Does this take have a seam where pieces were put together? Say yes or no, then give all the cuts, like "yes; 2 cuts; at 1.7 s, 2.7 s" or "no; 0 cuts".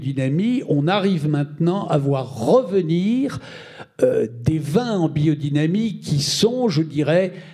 no; 0 cuts